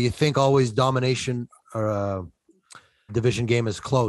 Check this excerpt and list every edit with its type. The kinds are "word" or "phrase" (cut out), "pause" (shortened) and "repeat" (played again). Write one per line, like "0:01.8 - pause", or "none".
0:03.1 - word